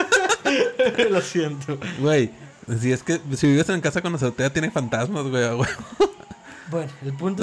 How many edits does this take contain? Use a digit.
0